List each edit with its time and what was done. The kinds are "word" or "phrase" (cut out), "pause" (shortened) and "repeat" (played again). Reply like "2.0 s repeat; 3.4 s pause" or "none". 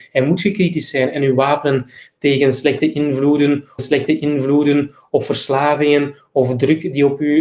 3.8 s repeat